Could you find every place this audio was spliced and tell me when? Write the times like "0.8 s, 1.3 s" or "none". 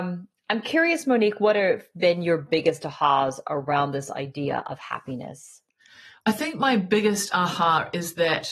none